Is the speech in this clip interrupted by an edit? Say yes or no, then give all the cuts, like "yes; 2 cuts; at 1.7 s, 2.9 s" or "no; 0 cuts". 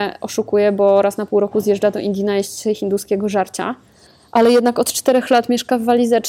no; 0 cuts